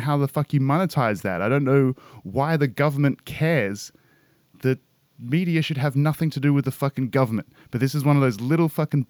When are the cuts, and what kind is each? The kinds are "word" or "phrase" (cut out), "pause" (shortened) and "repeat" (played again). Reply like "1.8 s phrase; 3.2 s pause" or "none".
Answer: none